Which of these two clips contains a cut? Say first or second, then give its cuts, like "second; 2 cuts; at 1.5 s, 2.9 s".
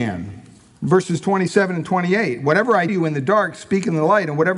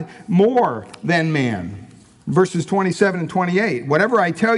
first; 1 cut; at 2.9 s